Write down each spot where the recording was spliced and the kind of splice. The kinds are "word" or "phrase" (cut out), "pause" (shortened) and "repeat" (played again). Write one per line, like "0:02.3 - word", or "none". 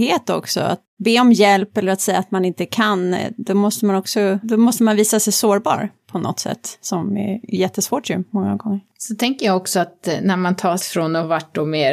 0:01.0 - word
0:04.4 - word
0:10.8 - word